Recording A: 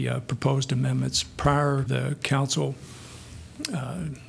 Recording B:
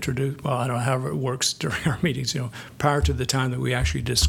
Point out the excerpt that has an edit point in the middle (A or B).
A